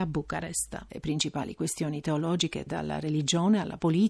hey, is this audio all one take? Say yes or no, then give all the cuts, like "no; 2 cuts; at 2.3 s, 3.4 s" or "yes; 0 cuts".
no; 1 cut; at 2.7 s